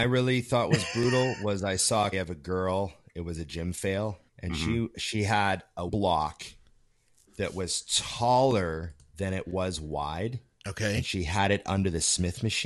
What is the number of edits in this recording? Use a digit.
4